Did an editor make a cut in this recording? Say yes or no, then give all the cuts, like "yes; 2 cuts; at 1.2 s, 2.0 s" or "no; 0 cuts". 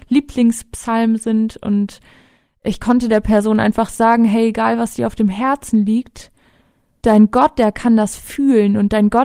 no; 0 cuts